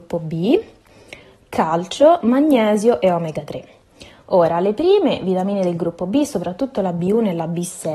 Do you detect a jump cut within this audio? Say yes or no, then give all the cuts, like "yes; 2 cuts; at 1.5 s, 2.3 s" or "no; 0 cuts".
no; 0 cuts